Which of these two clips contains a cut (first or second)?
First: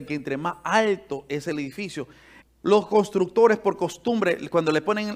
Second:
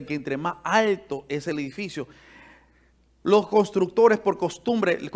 first